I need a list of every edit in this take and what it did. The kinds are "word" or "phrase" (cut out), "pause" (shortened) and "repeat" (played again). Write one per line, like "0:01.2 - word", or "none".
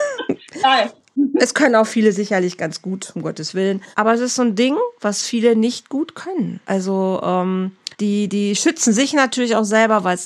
0:03.9 - pause
0:06.6 - pause
0:07.9 - pause